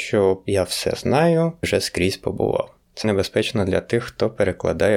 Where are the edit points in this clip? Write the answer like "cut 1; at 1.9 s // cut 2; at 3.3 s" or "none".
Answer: cut 1; at 1.6 s // cut 2; at 3.0 s